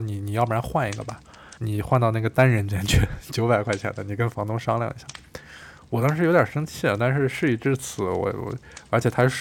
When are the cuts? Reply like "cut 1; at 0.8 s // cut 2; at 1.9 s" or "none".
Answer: cut 1; at 1.6 s